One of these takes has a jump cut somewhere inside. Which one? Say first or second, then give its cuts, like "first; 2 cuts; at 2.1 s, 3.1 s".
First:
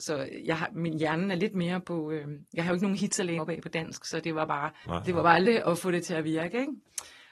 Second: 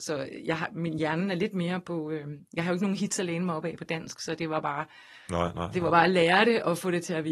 first; 3 cuts; at 3.4 s, 4.8 s, 5.4 s